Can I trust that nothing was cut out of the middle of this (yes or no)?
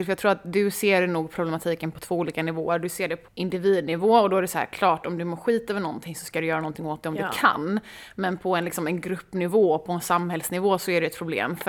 no